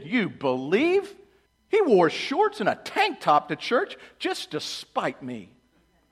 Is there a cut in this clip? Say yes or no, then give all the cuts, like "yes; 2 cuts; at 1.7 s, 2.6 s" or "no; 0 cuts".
yes; 1 cut; at 1.5 s